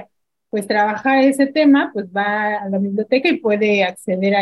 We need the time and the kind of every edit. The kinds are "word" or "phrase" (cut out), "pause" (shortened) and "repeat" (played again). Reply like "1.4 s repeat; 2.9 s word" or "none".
2.6 s word